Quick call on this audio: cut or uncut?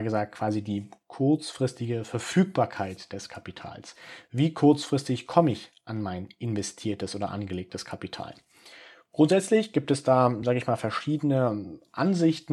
uncut